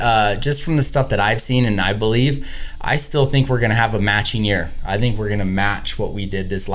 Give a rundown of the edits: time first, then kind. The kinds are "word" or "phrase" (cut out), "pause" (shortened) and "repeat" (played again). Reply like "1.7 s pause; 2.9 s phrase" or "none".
none